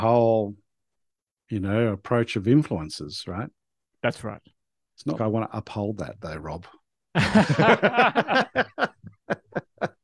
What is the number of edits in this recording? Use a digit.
1